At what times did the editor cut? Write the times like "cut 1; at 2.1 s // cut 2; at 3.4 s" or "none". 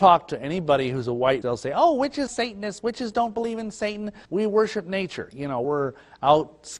cut 1; at 1.4 s // cut 2; at 2.3 s // cut 3; at 4.2 s // cut 4; at 5.6 s